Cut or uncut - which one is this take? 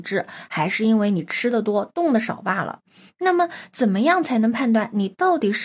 uncut